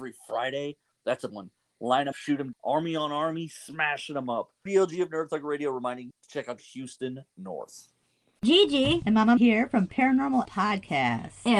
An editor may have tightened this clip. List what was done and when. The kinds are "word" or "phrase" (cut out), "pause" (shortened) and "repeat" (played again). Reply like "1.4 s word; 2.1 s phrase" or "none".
1.3 s word; 2.1 s word; 2.5 s word; 4.7 s word; 6.1 s word; 6.6 s word; 9.4 s word; 10.4 s word

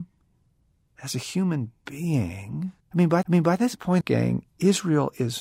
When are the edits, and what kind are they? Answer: 2.8 s pause; 3.2 s repeat; 4.0 s phrase

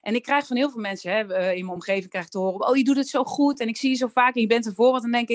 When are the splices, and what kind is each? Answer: none

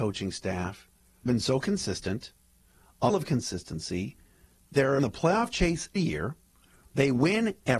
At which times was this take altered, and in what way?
1.3 s word; 3.1 s word; 5.0 s word; 6.0 s word

